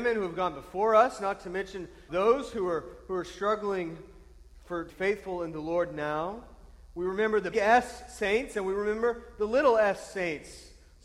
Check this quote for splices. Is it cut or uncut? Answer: cut